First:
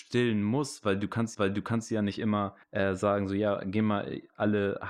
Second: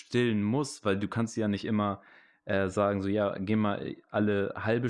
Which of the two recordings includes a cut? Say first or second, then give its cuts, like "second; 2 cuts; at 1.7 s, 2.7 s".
first; 2 cuts; at 1.3 s, 2.6 s